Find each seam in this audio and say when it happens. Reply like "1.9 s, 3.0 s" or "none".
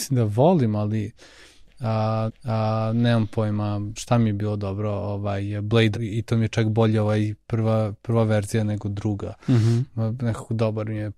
2.3 s, 4.0 s, 5.9 s, 7.4 s